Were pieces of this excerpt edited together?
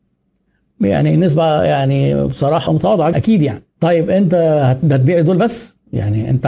yes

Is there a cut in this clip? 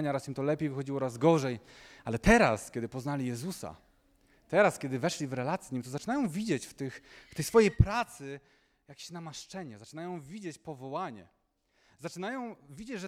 no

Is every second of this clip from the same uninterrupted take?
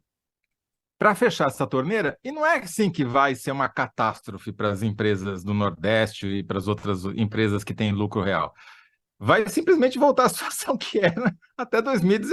yes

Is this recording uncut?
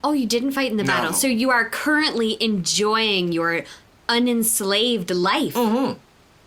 yes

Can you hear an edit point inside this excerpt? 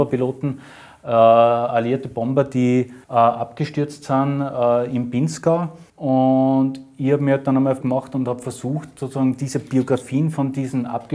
yes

